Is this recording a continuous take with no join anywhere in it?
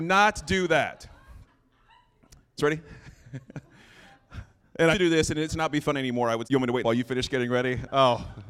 no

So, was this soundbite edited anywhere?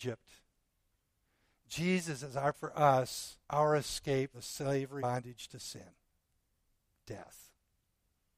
yes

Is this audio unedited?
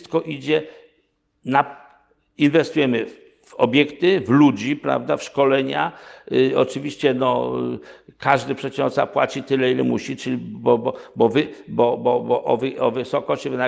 yes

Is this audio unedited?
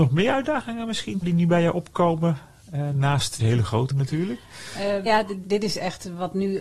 no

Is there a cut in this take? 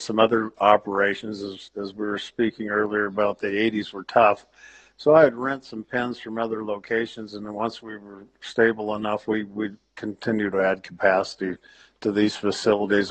no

